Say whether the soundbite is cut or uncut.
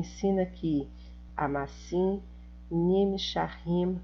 cut